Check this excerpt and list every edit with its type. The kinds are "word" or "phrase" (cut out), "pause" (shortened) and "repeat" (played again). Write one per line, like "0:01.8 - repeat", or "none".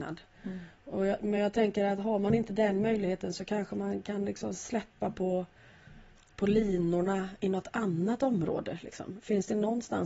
none